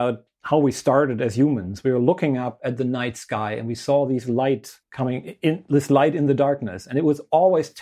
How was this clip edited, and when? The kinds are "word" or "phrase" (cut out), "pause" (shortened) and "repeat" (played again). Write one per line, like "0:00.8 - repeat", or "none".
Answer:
0:04.8 - pause